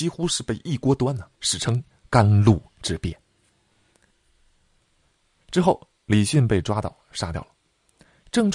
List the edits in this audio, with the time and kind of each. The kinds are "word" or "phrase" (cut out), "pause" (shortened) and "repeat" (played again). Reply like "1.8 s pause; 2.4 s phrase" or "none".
1.3 s pause